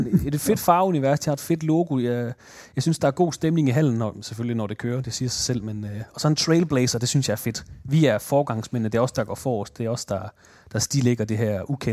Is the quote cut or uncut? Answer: uncut